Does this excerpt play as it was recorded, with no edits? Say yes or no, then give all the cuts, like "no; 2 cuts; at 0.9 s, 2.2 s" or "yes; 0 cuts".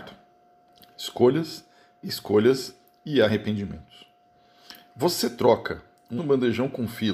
no; 1 cut; at 6.2 s